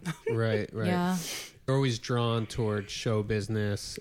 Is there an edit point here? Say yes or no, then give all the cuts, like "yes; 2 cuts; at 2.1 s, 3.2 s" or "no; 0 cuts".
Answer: yes; 1 cut; at 1.7 s